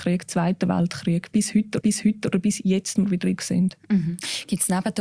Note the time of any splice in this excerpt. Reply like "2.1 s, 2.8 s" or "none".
1.8 s, 3.0 s, 3.4 s